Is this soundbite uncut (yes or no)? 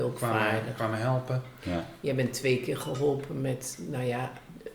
yes